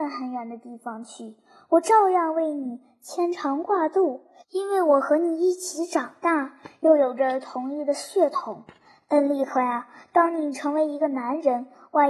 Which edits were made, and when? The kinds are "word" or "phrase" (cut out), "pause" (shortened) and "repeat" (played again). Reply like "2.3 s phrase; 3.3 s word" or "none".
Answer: none